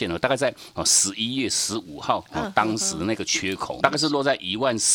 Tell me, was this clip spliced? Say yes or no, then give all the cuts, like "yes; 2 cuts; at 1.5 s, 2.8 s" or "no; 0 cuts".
yes; 1 cut; at 3.8 s